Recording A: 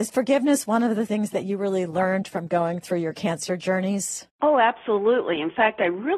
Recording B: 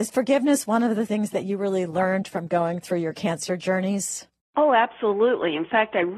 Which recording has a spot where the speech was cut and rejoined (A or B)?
A